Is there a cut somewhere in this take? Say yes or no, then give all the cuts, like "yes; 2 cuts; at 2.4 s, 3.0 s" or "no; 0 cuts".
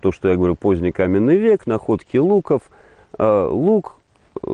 no; 0 cuts